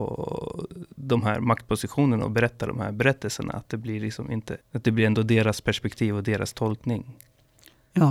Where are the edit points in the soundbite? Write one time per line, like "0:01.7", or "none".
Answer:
0:04.6